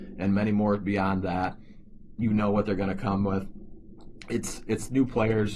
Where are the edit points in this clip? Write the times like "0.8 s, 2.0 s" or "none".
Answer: none